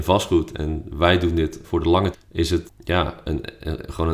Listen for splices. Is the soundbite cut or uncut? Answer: cut